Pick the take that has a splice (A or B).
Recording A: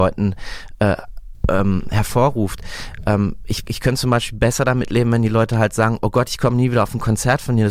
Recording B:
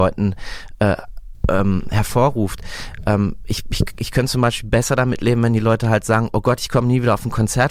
A